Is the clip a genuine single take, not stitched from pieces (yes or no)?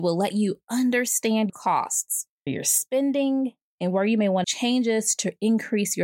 no